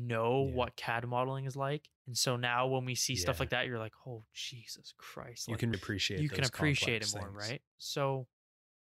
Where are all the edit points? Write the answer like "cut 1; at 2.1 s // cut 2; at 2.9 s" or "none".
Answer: cut 1; at 2.0 s // cut 2; at 5.7 s